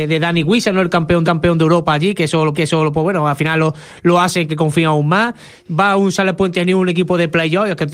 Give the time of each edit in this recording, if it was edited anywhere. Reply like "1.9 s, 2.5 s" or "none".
1.2 s, 2.5 s, 4.5 s